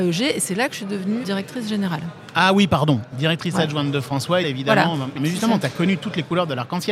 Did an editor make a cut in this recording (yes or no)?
yes